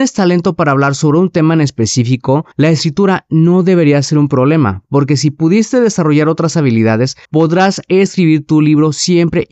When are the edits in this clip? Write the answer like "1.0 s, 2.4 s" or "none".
2.5 s, 7.2 s